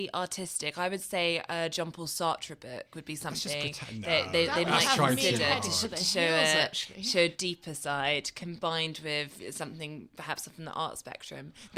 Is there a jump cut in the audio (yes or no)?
no